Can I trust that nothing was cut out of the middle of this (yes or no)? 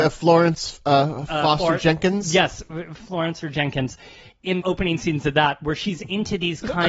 no